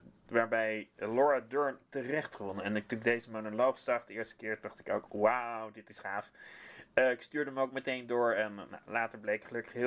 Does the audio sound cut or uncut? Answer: cut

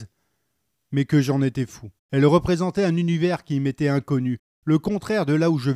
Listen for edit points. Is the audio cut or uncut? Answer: cut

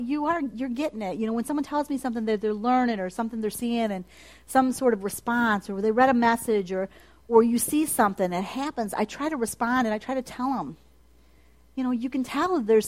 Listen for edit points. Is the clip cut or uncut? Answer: uncut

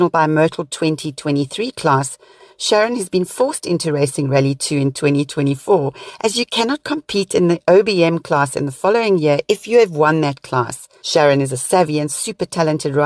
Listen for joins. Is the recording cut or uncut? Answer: uncut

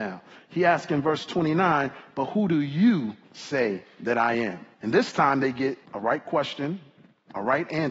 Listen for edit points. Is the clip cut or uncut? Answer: cut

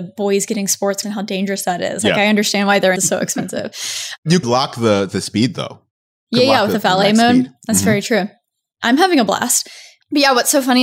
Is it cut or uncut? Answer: cut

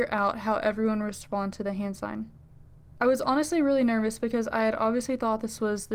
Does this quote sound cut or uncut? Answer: uncut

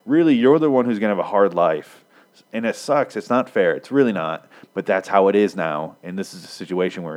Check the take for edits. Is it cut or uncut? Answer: uncut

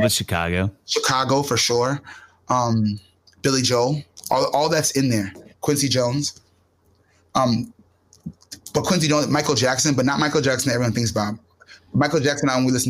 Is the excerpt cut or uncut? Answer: uncut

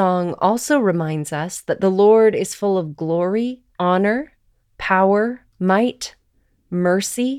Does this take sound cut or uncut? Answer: cut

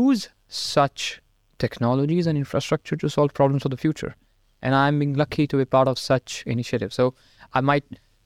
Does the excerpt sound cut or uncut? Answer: uncut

